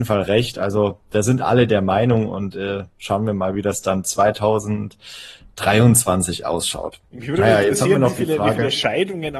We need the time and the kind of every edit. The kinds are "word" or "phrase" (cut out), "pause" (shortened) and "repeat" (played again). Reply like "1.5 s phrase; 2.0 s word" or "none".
4.0 s phrase; 7.1 s pause